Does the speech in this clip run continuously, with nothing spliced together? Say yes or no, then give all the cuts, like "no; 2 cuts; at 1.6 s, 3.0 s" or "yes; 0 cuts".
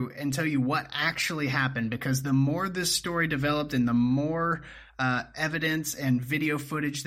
yes; 0 cuts